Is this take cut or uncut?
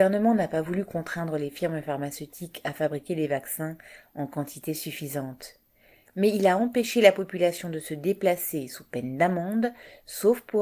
uncut